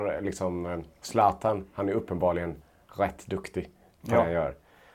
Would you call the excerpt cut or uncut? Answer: uncut